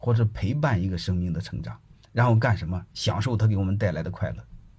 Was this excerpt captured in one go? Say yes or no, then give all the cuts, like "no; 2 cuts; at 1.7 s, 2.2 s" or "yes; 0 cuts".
no; 2 cuts; at 1.9 s, 2.9 s